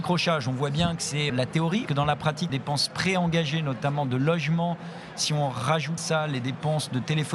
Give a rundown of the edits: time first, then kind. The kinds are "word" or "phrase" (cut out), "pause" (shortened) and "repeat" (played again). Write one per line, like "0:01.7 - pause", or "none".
0:01.3 - word
0:01.9 - word
0:02.5 - word
0:06.0 - word